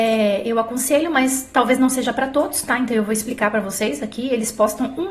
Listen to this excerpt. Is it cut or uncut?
uncut